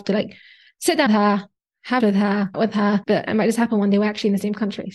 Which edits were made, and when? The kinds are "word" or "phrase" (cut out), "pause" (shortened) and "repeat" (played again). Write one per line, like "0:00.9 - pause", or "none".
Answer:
0:01.1 - word
0:02.0 - word
0:02.5 - word
0:03.3 - word